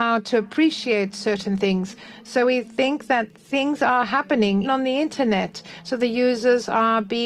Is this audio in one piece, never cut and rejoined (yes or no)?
no